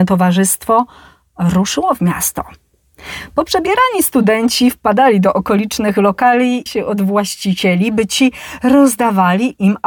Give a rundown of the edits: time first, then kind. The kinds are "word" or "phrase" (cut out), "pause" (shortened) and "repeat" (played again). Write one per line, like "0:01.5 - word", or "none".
0:06.7 - phrase